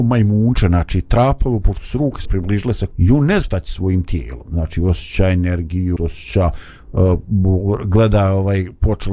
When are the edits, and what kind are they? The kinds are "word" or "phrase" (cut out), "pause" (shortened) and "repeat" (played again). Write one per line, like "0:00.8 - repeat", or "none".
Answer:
0:02.2 - word
0:02.9 - word
0:03.4 - word
0:06.0 - phrase

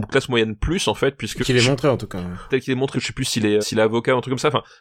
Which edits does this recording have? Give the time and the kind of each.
0:01.4 - word
0:02.5 - word
0:02.9 - word
0:03.6 - word

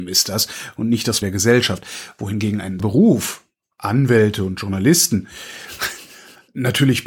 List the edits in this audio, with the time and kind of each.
0:01.2 - word
0:02.8 - word

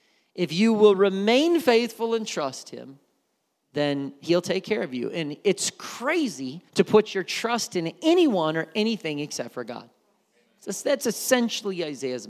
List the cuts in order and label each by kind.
0:06.7 - pause

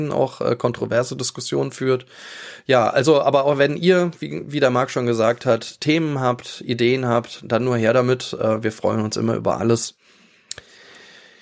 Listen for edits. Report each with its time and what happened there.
none

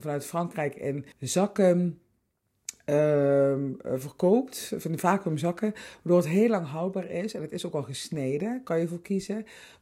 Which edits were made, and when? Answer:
0:01.1 - pause

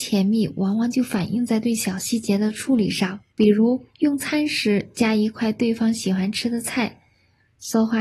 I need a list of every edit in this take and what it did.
0:03.3 - pause
0:03.9 - pause

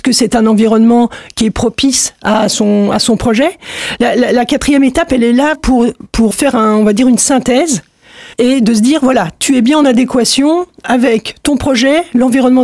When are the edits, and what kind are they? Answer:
0:05.5 - word
0:06.3 - word
0:08.3 - pause

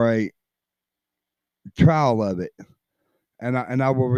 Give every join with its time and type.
none

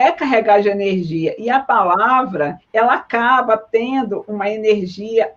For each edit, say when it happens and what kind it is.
0:02.6 - pause

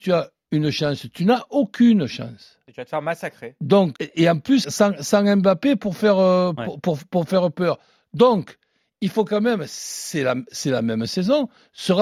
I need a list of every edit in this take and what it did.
0:04.0 - word
0:04.6 - word

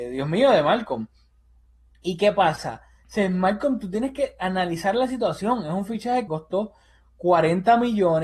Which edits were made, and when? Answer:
0:06.3 - word

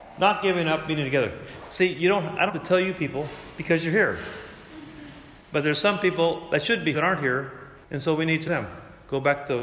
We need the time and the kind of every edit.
0:02.5 - word
0:05.4 - pause
0:06.9 - word
0:07.8 - pause
0:08.5 - word

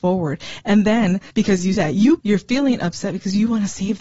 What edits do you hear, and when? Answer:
0:01.3 - pause
0:01.7 - word
0:02.2 - word

